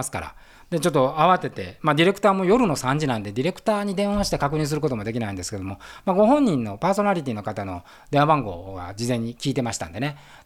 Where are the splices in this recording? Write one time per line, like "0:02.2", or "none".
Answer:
none